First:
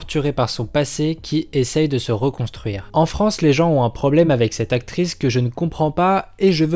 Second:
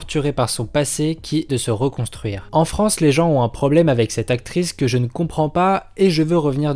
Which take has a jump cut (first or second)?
second